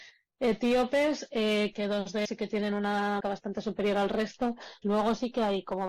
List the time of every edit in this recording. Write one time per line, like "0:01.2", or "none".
0:01.7
0:02.2
0:03.2
0:04.8